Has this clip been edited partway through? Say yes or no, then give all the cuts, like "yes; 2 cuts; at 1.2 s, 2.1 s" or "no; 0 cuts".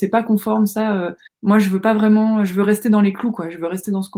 yes; 1 cut; at 1.3 s